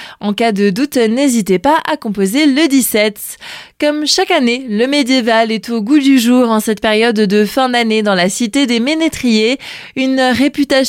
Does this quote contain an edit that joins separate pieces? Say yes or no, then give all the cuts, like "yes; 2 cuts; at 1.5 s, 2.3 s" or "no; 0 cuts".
no; 0 cuts